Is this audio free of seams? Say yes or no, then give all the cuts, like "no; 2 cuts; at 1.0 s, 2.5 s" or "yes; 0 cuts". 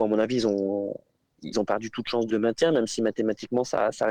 no; 2 cuts; at 1.5 s, 2.3 s